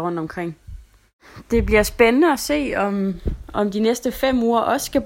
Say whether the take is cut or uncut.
uncut